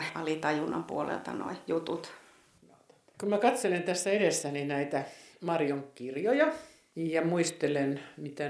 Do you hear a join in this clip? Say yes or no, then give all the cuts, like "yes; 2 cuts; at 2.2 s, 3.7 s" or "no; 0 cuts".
no; 0 cuts